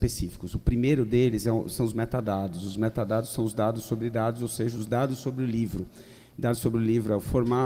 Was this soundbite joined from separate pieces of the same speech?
no; 0 cuts

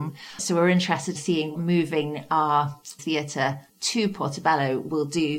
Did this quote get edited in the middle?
yes; 4 cuts; at 1.1 s, 1.5 s, 3.0 s, 3.7 s

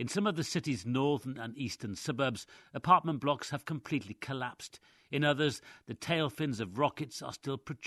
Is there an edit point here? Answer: no; 0 cuts

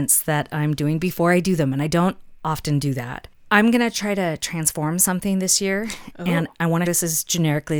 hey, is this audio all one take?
no; 1 cut; at 6.9 s

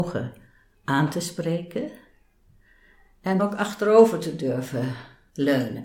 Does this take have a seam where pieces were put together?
yes; 1 cut; at 3.4 s

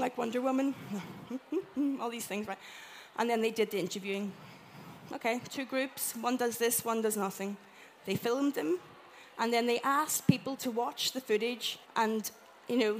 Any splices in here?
yes; 1 cut; at 11.8 s

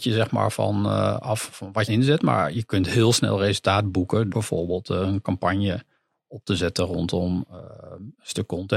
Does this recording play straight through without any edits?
no; 2 cuts; at 1.9 s, 4.3 s

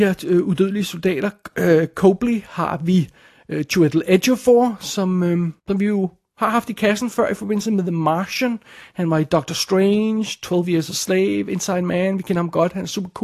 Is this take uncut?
no; 1 cut; at 5.6 s

